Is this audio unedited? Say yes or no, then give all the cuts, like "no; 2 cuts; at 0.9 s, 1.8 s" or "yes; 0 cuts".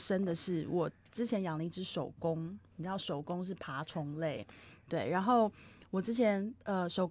yes; 0 cuts